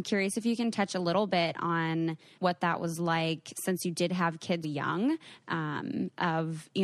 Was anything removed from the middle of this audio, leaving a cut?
yes; 2 cuts; at 2.4 s, 4.6 s

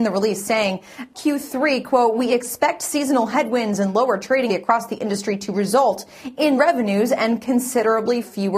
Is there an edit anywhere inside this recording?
yes; 3 cuts; at 1.1 s, 4.5 s, 6.6 s

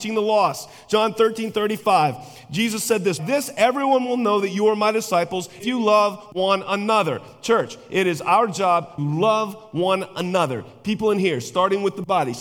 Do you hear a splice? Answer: yes; 3 cuts; at 3.2 s, 5.6 s, 9.0 s

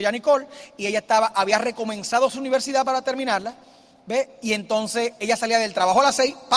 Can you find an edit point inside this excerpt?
no; 0 cuts

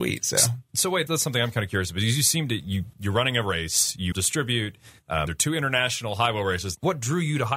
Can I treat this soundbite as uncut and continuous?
no; 4 cuts; at 1.1 s, 2.9 s, 4.1 s, 5.3 s

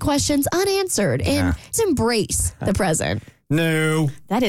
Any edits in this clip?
yes; 1 cut; at 1.7 s

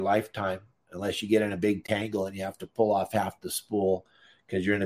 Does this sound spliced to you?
no; 0 cuts

